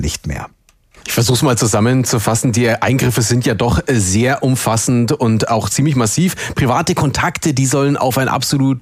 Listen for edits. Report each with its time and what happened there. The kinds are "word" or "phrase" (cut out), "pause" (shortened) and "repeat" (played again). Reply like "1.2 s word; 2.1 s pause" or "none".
none